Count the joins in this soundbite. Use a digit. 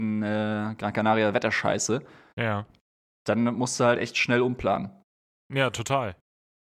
0